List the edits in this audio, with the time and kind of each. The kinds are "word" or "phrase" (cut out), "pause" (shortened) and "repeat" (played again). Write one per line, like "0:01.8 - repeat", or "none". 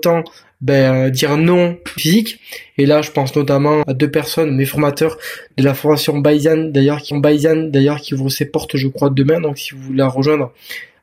0:02.0 - phrase
0:03.8 - word
0:07.1 - repeat